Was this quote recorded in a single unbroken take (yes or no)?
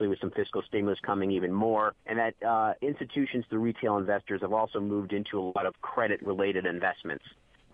no